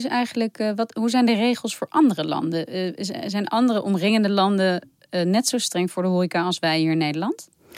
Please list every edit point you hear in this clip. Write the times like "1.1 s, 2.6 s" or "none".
none